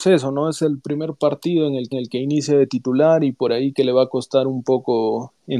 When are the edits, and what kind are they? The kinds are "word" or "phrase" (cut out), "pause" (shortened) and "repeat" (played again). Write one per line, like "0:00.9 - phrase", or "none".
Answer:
0:01.9 - repeat